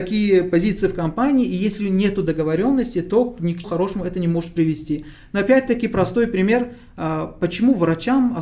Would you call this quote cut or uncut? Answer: cut